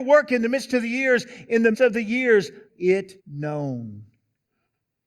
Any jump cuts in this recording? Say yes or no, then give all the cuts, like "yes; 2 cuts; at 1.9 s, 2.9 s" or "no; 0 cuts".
yes; 3 cuts; at 1.7 s, 2.7 s, 3.2 s